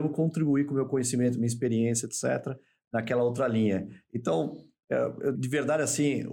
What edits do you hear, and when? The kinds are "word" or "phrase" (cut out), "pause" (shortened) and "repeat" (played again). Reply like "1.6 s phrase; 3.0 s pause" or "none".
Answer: 5.3 s word